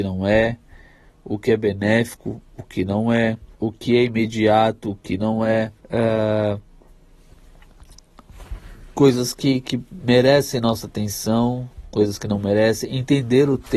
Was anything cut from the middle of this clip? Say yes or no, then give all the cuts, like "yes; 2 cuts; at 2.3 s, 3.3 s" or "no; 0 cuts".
yes; 2 cuts; at 3.5 s, 5.8 s